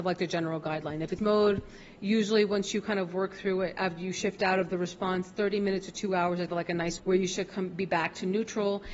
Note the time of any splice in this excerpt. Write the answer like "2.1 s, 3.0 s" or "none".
1.2 s, 6.5 s, 7.0 s